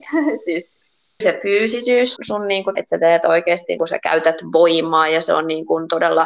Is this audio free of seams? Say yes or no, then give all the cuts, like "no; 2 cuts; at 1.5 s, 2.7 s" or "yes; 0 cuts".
no; 4 cuts; at 1.2 s, 2.2 s, 2.8 s, 3.8 s